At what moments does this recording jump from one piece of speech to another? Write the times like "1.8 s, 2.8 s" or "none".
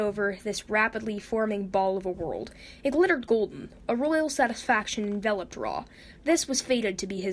none